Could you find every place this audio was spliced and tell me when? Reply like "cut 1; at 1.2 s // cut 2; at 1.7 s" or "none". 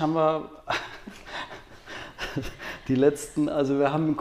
none